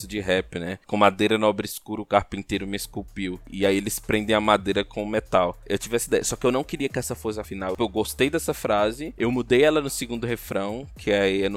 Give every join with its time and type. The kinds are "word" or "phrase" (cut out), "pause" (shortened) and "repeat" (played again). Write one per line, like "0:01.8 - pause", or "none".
0:07.5 - word